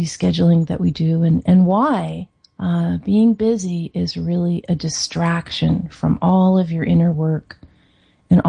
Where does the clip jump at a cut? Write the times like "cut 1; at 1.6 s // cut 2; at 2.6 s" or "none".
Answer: cut 1; at 2.4 s

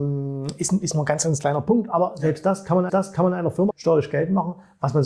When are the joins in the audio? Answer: cut 1; at 2.9 s // cut 2; at 3.7 s

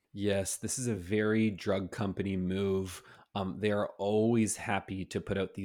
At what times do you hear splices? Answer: none

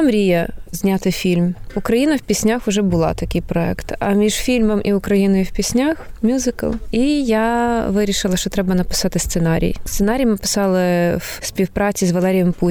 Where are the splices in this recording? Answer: none

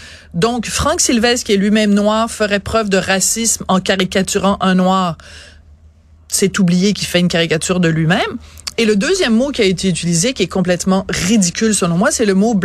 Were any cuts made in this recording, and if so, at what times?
none

